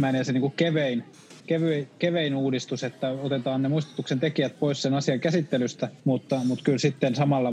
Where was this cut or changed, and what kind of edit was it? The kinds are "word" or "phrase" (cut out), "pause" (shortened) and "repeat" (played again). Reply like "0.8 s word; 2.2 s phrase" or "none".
1.4 s pause; 6.0 s pause